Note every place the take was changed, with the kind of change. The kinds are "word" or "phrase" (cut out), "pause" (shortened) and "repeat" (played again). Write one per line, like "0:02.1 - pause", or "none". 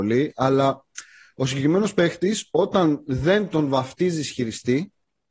none

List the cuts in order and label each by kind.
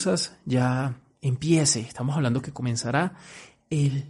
none

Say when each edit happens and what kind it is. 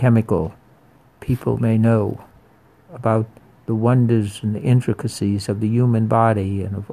none

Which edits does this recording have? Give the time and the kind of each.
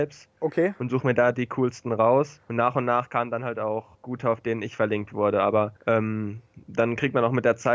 0:02.4 - pause
0:03.9 - pause
0:05.8 - pause

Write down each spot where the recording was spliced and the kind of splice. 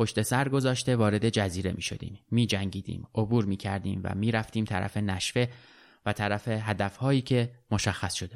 none

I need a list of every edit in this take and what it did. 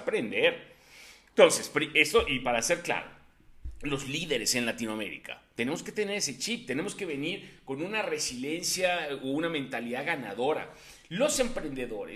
none

